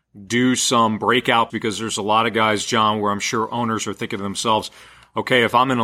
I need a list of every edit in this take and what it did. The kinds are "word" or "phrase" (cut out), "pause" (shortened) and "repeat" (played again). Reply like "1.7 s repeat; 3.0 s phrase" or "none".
1.5 s word